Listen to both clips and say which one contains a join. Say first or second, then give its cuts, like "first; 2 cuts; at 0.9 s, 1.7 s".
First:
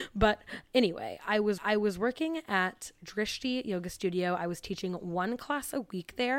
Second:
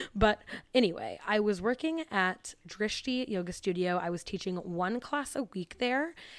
first; 1 cut; at 1.6 s